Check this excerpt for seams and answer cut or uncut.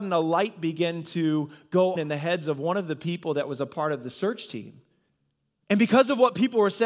cut